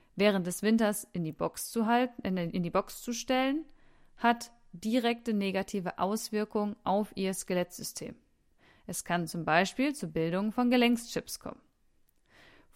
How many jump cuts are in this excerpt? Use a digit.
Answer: 0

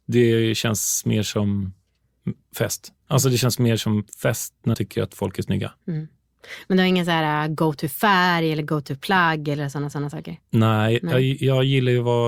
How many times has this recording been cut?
3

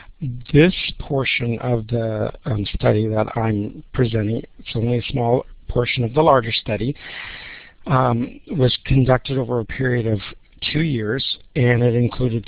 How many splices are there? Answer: 0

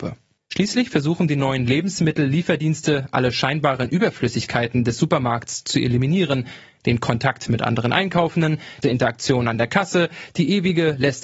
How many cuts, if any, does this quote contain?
1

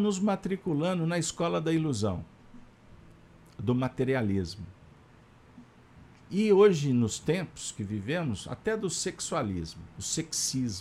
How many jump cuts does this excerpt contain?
0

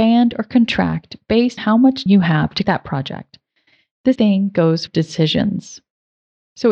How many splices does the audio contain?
5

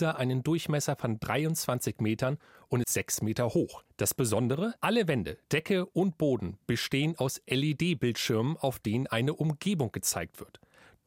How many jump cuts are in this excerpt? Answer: 4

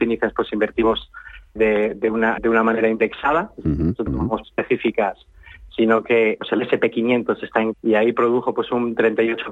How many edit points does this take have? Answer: 6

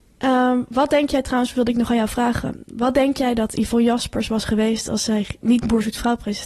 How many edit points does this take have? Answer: 0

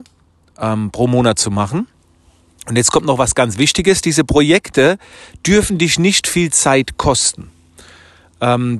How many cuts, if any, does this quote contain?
0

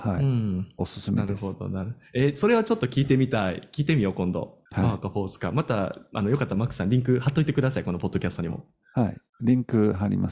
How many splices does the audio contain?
1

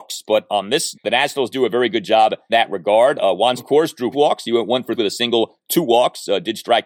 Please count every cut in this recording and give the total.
6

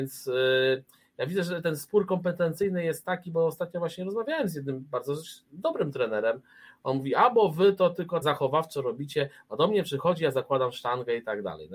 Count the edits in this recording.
1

